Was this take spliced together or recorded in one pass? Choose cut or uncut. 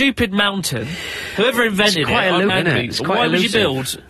cut